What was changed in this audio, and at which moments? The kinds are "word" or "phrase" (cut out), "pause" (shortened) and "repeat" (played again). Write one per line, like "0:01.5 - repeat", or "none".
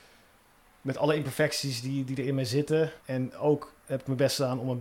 0:03.0 - pause
0:03.8 - pause